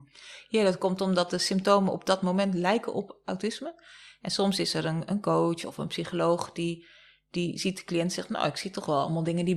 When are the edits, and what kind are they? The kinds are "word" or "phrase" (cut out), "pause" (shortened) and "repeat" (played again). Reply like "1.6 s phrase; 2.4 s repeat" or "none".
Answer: none